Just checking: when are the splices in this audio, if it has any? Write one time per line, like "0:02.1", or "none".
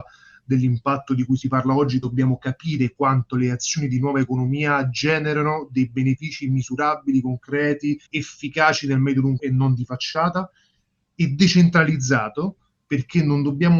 0:08.1
0:09.4

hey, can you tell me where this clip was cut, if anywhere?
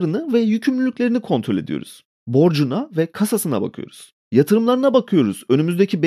none

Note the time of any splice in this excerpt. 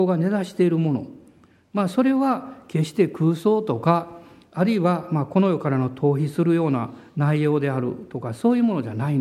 none

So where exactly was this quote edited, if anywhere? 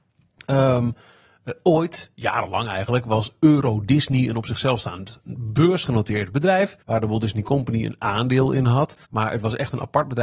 0:06.8
0:09.0

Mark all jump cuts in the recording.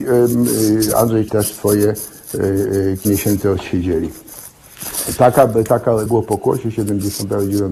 0:01.3
0:03.0
0:06.1

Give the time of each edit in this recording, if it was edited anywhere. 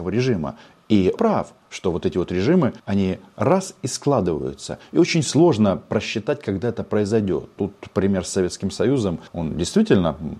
0:01.2
0:02.8
0:09.3

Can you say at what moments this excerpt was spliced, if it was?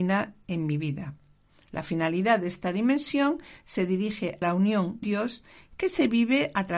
0:04.4
0:05.0

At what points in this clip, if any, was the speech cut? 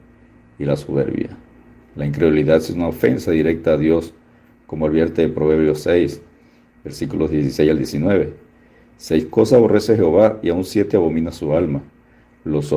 none

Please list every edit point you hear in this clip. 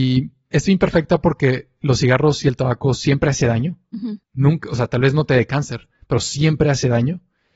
0:04.2

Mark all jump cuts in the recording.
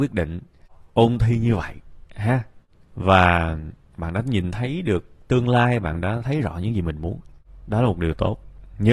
none

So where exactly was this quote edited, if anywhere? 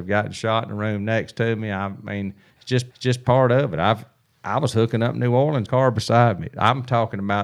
0:02.5
0:02.9
0:05.7

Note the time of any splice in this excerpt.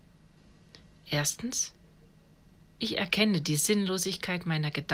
none

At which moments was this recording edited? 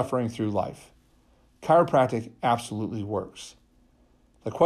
none

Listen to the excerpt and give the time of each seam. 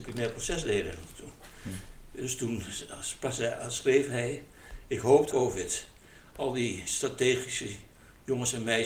0:05.3

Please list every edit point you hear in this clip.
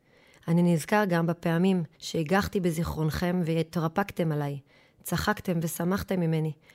0:01.9

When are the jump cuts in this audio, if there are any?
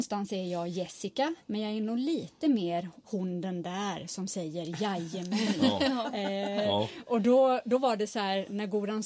0:01.4
0:03.0

